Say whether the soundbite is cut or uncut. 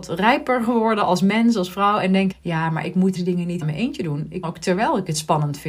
cut